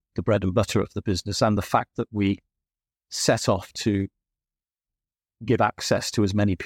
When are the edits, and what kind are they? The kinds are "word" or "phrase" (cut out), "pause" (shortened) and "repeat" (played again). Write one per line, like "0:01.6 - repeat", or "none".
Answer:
none